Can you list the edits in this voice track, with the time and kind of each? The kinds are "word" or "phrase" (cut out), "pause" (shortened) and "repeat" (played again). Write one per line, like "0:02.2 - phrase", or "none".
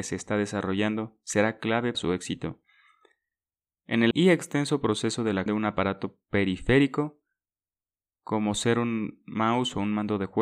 0:01.9 - word
0:04.1 - word
0:05.5 - word